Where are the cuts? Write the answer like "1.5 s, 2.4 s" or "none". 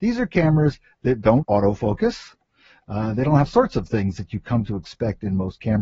1.4 s, 3.5 s